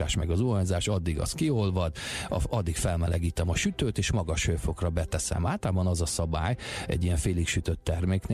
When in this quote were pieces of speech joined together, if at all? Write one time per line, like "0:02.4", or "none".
none